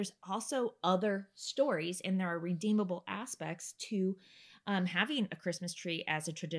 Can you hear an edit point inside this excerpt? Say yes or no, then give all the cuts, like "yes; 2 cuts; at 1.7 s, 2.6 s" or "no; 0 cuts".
no; 0 cuts